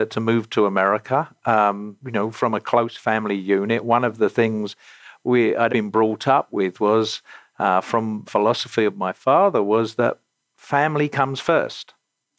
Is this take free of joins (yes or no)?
no